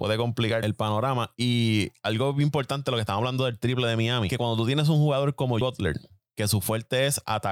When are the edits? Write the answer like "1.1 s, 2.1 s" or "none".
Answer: 5.6 s